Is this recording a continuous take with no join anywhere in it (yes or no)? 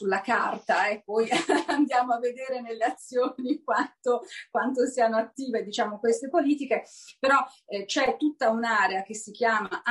yes